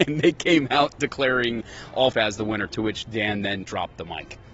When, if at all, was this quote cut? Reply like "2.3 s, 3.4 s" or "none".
2.1 s, 3.6 s